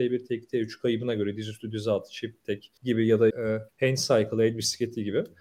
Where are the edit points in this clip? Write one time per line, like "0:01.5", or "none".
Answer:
0:02.8
0:03.3
0:03.7